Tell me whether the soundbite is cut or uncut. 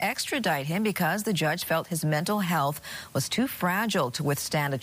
uncut